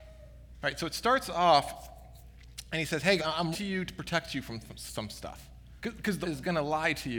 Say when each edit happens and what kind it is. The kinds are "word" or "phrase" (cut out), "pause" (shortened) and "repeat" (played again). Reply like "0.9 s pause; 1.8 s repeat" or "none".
3.2 s word; 3.5 s word; 5.8 s pause; 6.2 s word